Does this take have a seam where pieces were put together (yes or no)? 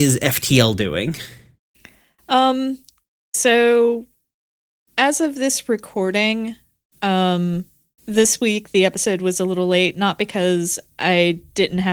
no